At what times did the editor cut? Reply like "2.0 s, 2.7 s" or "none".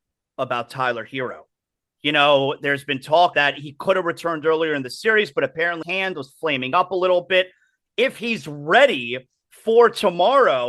3.3 s, 5.8 s